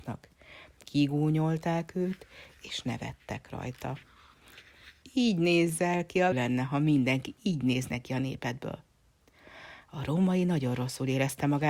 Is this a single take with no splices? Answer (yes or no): no